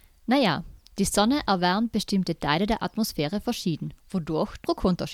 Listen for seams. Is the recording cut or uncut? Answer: cut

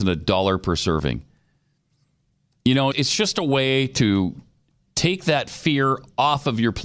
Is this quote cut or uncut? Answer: cut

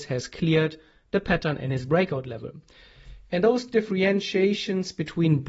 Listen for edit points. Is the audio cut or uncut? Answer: uncut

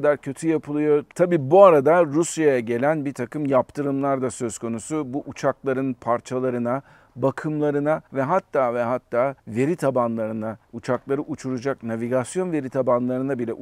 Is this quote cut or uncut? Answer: cut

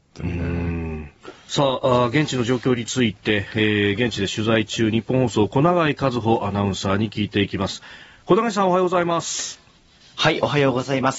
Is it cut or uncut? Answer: uncut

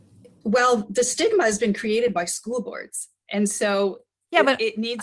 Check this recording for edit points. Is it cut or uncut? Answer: uncut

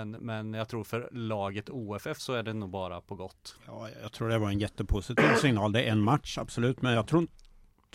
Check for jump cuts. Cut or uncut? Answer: uncut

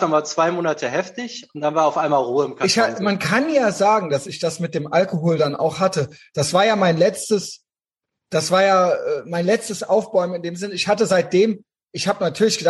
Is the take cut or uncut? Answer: uncut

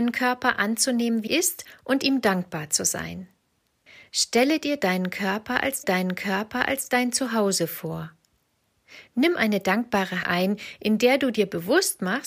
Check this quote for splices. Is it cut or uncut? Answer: cut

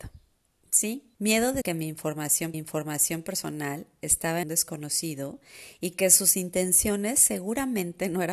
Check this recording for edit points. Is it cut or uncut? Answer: cut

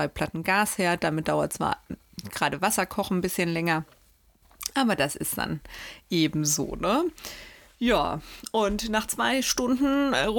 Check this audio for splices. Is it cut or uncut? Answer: uncut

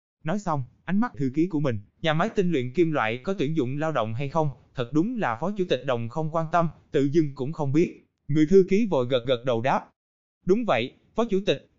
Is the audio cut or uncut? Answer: cut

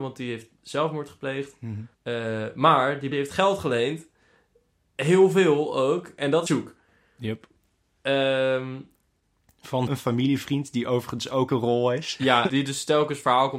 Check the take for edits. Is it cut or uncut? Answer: cut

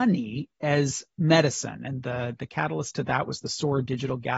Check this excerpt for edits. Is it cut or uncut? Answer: uncut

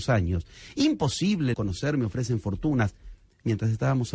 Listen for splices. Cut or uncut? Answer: cut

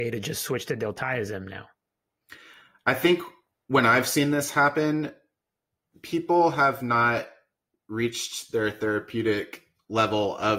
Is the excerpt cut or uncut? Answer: uncut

